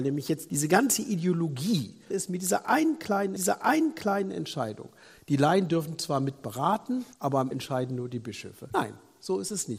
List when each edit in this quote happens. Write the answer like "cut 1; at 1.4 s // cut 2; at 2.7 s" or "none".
cut 1; at 2.1 s // cut 2; at 3.4 s // cut 3; at 7.1 s // cut 4; at 7.5 s